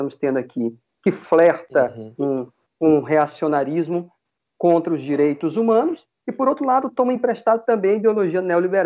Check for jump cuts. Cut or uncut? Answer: uncut